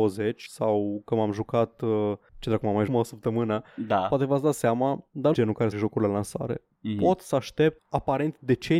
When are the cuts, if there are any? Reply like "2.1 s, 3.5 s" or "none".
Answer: 2.9 s, 5.3 s, 5.7 s, 7.8 s